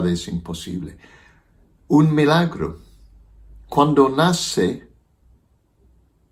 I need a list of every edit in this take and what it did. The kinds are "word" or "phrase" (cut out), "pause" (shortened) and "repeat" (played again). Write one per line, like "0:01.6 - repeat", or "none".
none